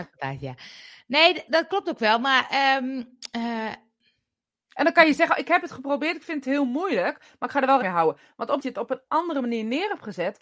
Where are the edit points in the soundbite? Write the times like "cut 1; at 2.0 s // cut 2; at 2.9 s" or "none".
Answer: cut 1; at 1.5 s // cut 2; at 7.8 s // cut 3; at 8.6 s